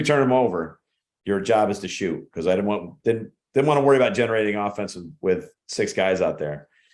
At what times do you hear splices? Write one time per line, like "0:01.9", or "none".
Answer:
0:05.6